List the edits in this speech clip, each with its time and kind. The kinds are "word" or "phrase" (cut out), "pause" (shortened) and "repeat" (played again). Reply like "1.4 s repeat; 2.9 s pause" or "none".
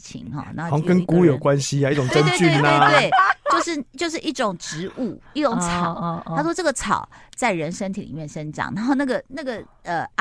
none

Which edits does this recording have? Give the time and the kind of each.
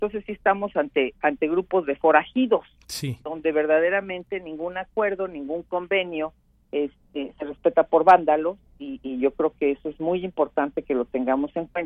none

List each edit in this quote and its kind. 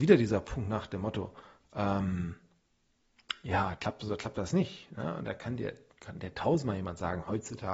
none

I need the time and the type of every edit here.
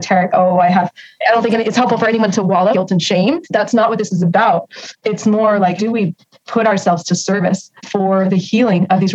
2.7 s word; 3.4 s pause; 5.8 s word; 7.8 s pause

